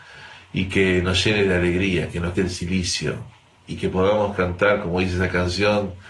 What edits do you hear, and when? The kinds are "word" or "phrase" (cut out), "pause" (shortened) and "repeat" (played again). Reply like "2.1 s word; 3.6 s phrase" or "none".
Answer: 2.3 s word